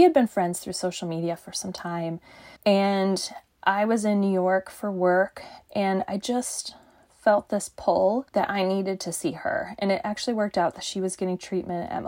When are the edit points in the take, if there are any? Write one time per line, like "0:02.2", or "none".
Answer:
0:02.6
0:08.3